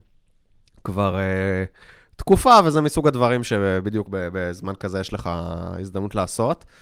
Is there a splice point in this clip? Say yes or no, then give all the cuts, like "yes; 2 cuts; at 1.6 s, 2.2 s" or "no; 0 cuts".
no; 0 cuts